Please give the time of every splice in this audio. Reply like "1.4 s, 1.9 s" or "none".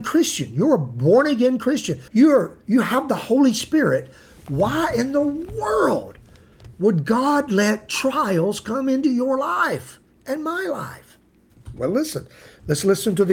2.1 s, 10.1 s